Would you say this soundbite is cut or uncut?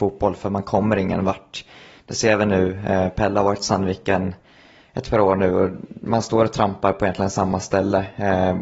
uncut